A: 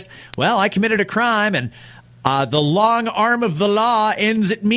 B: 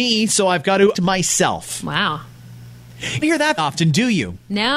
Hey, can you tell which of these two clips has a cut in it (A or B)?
B